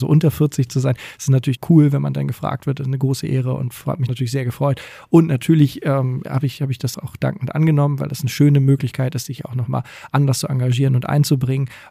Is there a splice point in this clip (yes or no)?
yes